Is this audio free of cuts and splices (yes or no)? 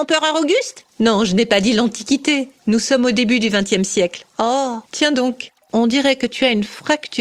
no